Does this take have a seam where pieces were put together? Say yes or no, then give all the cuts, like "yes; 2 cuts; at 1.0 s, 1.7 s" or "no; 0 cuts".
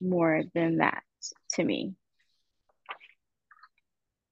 no; 0 cuts